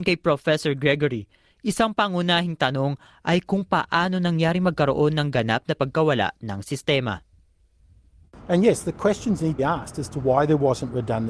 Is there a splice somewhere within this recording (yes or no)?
yes